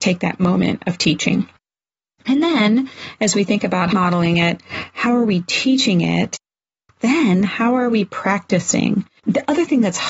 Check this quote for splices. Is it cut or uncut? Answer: cut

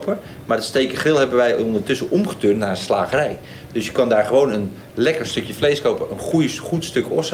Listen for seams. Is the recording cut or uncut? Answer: uncut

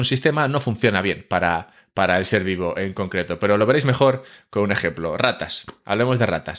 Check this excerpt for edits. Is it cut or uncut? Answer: uncut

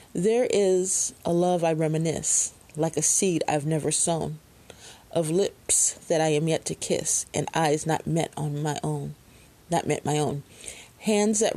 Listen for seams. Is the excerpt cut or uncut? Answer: cut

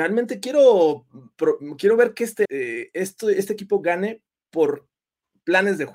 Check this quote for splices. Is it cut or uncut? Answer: cut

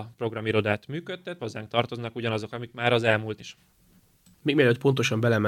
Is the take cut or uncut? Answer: cut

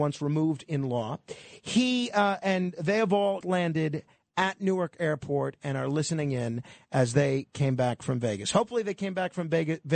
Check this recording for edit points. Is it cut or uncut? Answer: cut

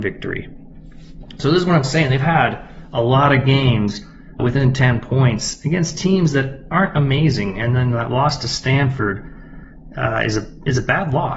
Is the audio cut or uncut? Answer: cut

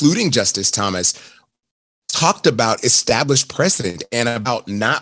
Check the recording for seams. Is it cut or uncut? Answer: uncut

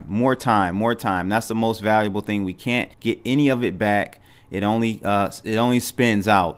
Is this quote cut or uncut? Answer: cut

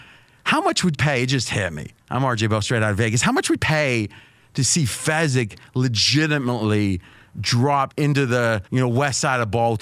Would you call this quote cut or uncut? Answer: cut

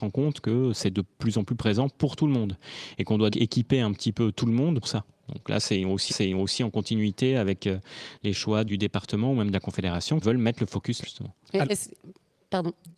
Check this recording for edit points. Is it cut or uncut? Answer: cut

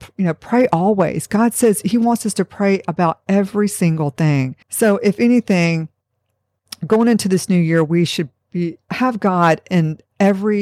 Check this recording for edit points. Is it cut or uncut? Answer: cut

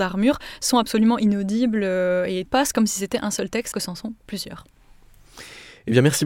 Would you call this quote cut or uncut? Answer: cut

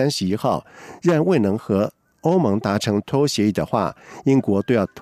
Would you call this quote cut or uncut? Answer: uncut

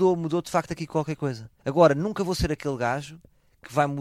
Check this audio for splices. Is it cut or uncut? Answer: cut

